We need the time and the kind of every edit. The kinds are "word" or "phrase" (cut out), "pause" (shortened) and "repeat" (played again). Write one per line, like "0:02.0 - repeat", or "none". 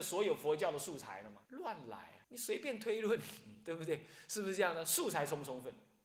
0:01.5 - pause
0:02.2 - pause